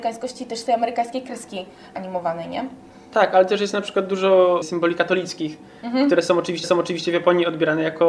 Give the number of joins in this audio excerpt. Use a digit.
1